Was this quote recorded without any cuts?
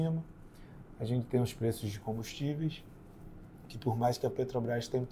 yes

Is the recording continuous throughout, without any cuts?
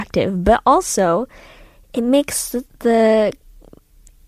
yes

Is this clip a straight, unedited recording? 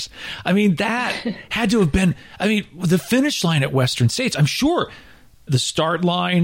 no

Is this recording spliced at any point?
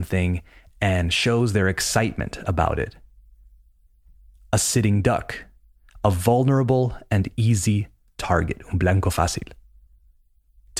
no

